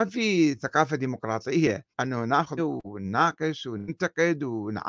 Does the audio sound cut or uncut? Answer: cut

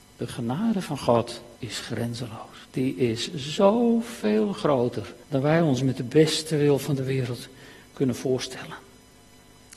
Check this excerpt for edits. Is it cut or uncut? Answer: cut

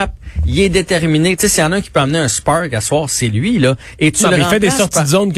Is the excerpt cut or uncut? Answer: uncut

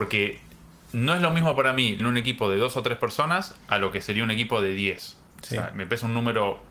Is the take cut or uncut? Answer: cut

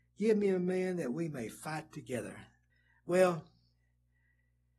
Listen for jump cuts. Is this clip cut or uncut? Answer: cut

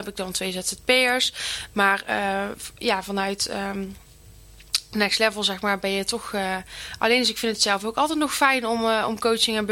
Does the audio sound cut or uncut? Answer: uncut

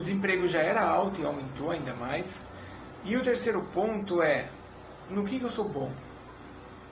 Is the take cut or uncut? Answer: uncut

